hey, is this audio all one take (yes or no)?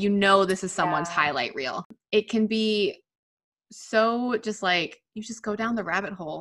yes